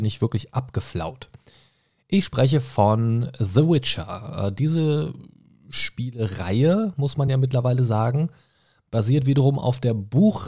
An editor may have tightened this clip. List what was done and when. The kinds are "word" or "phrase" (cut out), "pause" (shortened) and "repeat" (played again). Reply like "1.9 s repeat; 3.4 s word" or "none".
none